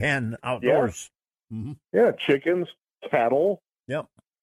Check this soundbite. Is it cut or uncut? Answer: uncut